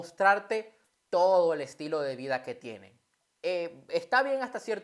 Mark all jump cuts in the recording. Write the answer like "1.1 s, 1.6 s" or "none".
none